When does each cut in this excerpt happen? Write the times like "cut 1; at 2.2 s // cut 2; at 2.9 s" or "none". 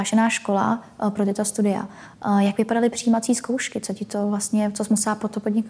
none